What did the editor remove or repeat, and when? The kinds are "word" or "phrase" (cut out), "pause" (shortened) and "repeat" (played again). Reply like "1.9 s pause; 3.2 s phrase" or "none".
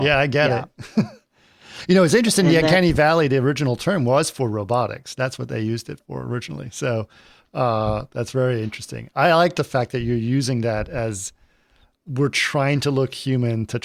none